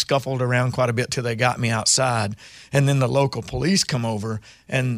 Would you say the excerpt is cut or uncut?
uncut